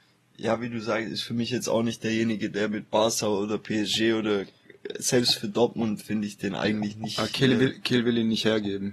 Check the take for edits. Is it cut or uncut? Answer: uncut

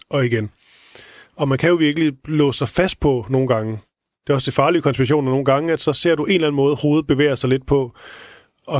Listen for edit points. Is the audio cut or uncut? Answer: uncut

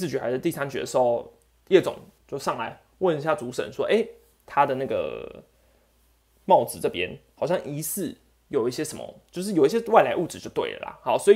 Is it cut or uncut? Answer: uncut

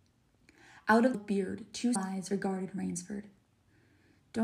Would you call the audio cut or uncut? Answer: cut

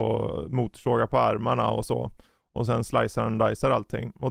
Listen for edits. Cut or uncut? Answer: uncut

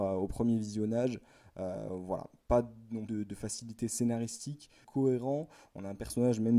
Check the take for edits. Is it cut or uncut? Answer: cut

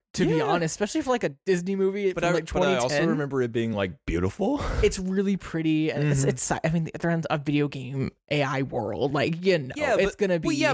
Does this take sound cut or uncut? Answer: uncut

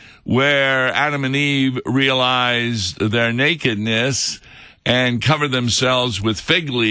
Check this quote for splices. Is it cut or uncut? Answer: uncut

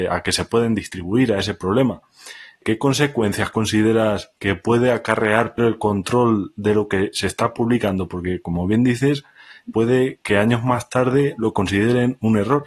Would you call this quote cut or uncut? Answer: cut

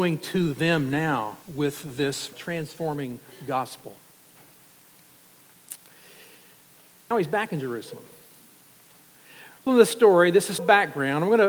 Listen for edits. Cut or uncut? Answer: cut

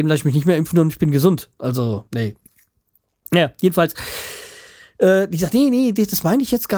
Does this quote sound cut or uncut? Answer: cut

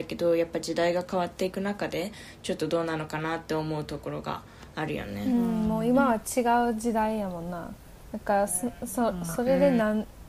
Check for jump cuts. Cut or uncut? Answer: uncut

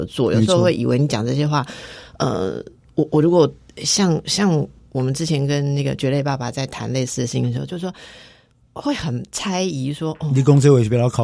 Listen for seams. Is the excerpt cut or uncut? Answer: uncut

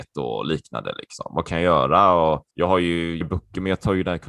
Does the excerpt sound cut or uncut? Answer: cut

